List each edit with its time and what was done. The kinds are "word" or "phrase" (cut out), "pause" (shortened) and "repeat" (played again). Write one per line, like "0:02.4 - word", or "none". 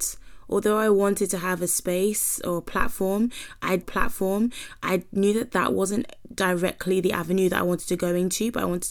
0:03.8 - repeat